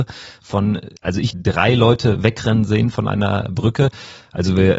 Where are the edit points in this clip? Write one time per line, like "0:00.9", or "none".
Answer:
0:01.0
0:01.3